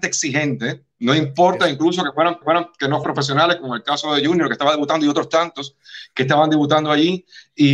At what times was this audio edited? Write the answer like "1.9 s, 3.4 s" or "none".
2.4 s, 3.0 s